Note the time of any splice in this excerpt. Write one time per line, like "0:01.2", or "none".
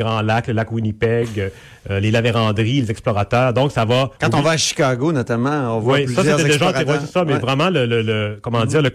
0:04.2